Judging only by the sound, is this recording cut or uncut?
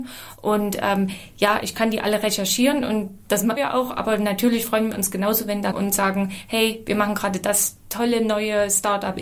cut